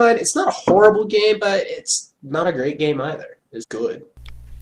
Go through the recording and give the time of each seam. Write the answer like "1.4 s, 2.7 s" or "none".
2.2 s, 3.6 s